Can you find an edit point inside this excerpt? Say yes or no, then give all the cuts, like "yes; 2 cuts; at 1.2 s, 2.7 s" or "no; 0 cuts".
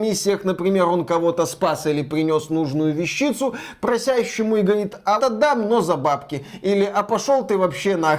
yes; 1 cut; at 5.2 s